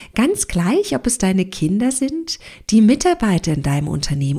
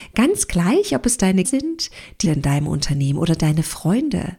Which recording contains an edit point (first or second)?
second